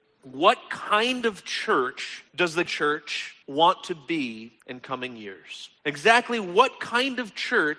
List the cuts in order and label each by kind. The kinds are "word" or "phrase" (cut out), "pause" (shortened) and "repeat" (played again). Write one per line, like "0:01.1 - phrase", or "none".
0:02.3 - pause
0:02.7 - word
0:03.4 - pause
0:04.6 - pause
0:05.8 - pause